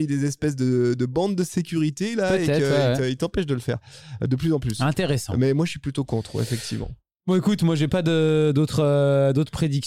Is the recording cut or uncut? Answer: uncut